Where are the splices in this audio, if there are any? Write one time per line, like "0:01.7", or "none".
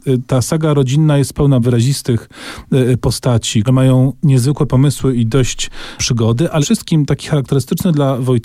0:01.6
0:03.7
0:06.0
0:06.6